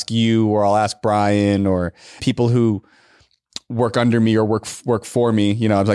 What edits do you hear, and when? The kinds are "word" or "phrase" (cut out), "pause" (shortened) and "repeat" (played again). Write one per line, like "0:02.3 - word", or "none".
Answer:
0:02.2 - word